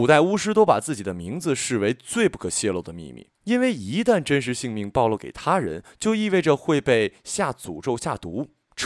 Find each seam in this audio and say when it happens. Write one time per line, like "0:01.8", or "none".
0:03.3